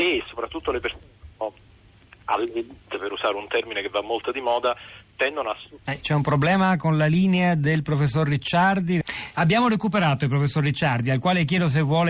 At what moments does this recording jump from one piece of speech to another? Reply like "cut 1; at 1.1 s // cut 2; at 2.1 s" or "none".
cut 1; at 1.3 s // cut 2; at 5.8 s